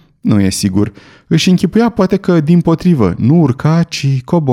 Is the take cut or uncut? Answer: uncut